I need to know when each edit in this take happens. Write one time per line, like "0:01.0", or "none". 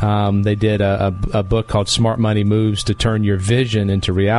none